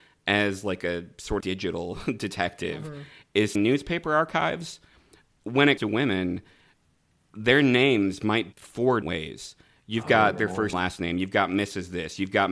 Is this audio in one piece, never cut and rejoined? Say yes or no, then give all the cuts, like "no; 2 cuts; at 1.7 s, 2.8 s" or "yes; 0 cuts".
no; 6 cuts; at 1.4 s, 3.5 s, 5.8 s, 8.5 s, 9.0 s, 10.7 s